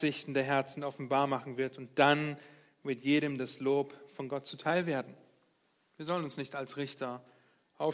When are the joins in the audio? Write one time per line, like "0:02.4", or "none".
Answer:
none